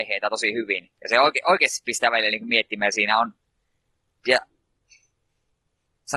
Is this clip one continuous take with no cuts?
yes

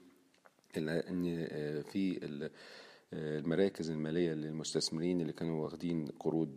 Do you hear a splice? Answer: no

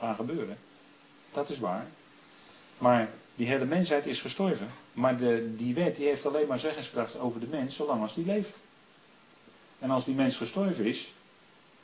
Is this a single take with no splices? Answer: no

